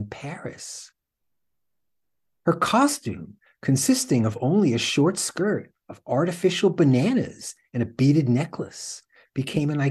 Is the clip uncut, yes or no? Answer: yes